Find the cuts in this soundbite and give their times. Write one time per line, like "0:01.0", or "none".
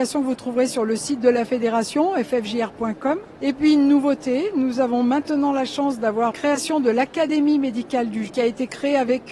0:06.3
0:08.3